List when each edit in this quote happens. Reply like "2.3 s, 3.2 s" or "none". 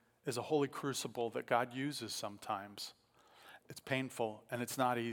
3.6 s